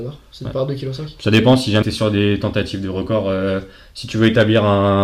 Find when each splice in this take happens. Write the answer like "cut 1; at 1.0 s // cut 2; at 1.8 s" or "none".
cut 1; at 1.8 s